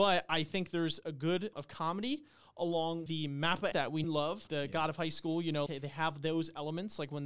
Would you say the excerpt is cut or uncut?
cut